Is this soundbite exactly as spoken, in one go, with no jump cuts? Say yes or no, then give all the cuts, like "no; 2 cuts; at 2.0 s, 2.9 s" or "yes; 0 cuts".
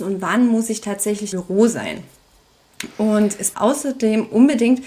no; 2 cuts; at 1.3 s, 3.5 s